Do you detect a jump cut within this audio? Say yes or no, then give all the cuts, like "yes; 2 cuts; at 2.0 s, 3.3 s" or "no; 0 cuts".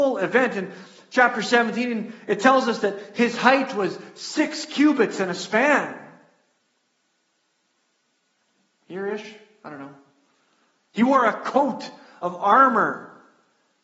no; 0 cuts